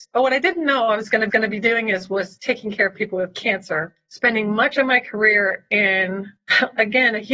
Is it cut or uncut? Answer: cut